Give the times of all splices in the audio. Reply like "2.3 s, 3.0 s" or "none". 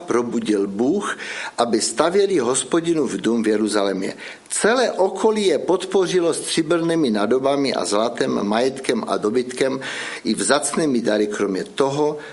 none